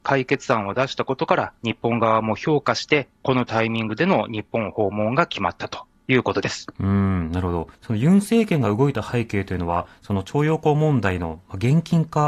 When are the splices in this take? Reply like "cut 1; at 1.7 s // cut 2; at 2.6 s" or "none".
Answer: cut 1; at 1.6 s // cut 2; at 3.2 s // cut 3; at 7.7 s